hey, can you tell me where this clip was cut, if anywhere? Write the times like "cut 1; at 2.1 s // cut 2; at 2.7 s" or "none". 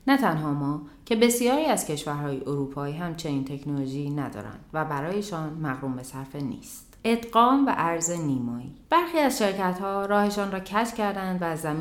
cut 1; at 7.0 s // cut 2; at 8.8 s